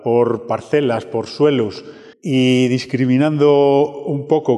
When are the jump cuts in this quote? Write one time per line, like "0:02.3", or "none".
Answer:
0:02.1